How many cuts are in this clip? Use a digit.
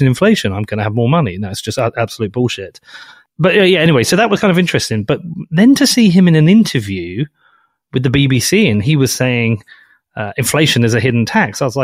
0